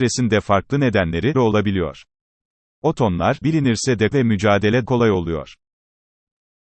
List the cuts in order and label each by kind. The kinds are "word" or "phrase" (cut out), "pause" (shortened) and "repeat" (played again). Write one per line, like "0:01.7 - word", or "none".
0:01.3 - word
0:03.4 - word
0:04.1 - word
0:04.9 - word